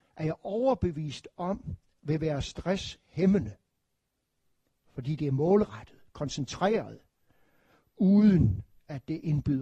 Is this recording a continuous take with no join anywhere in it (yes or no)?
yes